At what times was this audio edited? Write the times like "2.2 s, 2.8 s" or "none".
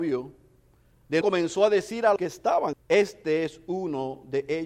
1.2 s, 2.2 s, 2.7 s